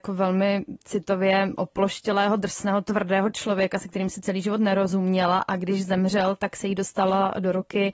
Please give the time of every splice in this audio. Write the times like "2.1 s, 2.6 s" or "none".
none